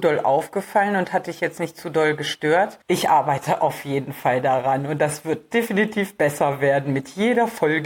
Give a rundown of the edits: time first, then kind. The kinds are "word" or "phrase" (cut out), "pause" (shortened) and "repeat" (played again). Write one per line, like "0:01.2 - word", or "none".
0:02.8 - pause

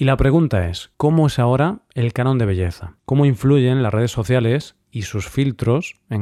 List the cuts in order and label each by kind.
0:00.9 - pause
0:03.0 - pause

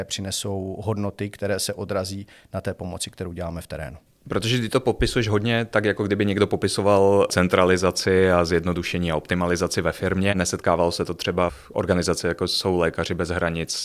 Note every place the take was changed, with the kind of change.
none

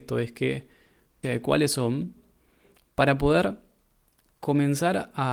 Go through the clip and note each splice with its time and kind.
0:01.2 - phrase

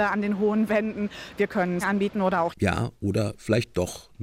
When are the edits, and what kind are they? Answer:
0:01.8 - word
0:02.5 - word

